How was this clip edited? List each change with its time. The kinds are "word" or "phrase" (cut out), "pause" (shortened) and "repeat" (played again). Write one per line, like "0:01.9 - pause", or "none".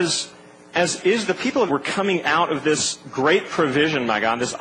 0:01.7 - word
0:03.0 - pause